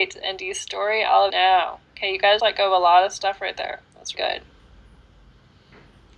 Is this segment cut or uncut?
cut